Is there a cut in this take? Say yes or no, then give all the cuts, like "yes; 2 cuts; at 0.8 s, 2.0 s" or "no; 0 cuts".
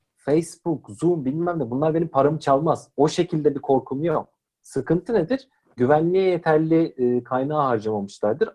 no; 0 cuts